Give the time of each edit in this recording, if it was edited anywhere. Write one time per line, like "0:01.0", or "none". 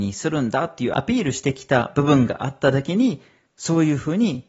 0:03.5